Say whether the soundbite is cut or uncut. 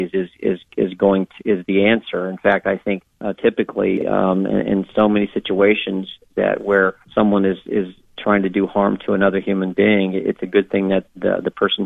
cut